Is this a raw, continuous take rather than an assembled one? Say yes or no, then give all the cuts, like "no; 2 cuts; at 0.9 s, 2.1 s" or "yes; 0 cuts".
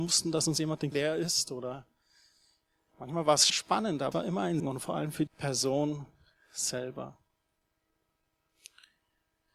no; 5 cuts; at 0.9 s, 3.5 s, 4.1 s, 4.6 s, 5.3 s